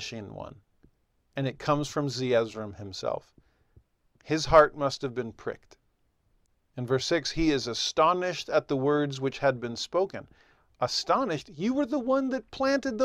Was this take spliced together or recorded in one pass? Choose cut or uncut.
uncut